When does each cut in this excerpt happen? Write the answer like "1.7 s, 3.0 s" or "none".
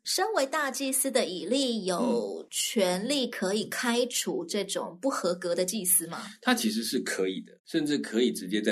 7.6 s